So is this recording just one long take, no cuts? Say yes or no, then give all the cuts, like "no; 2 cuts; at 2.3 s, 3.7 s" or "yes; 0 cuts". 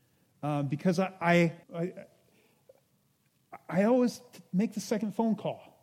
no; 1 cut; at 1.6 s